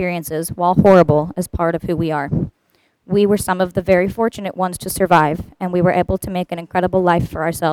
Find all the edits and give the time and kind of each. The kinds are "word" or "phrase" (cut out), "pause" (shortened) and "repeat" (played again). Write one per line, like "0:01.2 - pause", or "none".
none